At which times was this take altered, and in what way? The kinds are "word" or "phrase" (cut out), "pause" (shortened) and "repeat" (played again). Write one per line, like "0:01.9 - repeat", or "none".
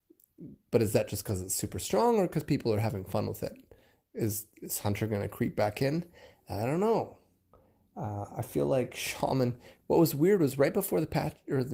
none